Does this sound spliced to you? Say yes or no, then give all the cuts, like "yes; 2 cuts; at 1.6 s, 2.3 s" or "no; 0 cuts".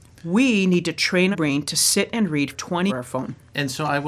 yes; 3 cuts; at 1.3 s, 2.5 s, 2.9 s